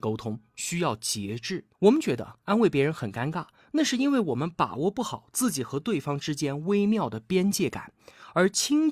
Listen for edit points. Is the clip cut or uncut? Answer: cut